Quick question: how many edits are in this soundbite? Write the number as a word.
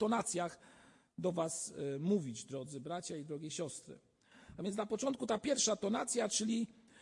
zero